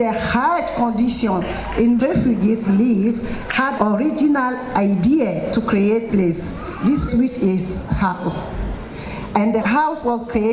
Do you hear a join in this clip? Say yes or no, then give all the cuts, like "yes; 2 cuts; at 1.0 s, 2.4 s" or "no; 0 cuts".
yes; 6 cuts; at 2.0 s, 3.8 s, 6.1 s, 7.1 s, 7.9 s, 9.6 s